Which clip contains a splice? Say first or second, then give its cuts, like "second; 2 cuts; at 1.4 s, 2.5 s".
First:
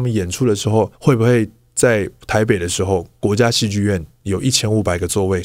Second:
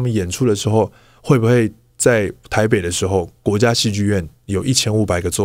first; 1 cut; at 1.0 s